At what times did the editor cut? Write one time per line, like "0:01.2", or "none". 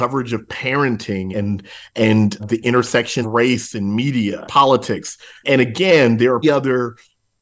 0:01.3
0:02.4
0:03.2
0:04.4
0:05.4
0:06.4